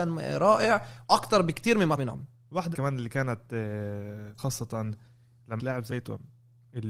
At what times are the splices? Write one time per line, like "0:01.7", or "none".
0:01.0
0:02.0
0:02.7
0:04.4
0:05.6
0:05.9